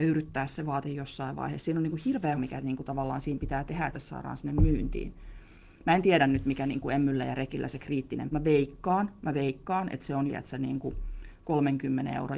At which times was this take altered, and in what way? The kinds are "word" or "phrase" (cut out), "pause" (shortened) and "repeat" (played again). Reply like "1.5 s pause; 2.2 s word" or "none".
2.4 s word; 3.9 s phrase; 8.3 s phrase; 10.3 s word